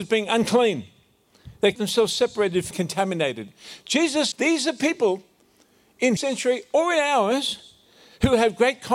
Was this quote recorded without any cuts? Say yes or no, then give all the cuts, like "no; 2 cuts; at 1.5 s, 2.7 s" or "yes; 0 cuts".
no; 4 cuts; at 1.7 s, 2.7 s, 4.3 s, 6.2 s